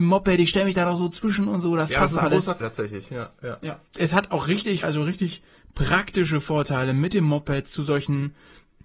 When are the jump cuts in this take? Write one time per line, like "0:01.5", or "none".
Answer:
0:02.6
0:03.9
0:04.8